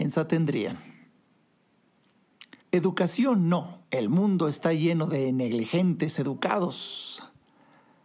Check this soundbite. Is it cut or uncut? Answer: cut